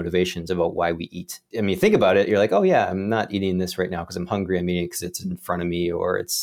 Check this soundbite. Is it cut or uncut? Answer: uncut